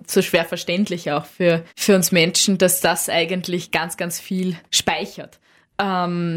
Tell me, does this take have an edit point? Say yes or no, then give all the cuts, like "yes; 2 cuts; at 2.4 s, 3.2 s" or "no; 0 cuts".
yes; 2 cuts; at 1.7 s, 4.7 s